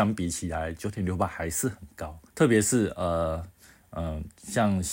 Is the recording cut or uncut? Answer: cut